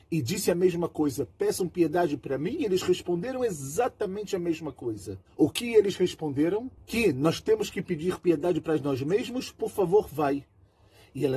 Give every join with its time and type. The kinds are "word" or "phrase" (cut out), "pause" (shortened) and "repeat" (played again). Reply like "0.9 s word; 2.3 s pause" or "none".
5.3 s pause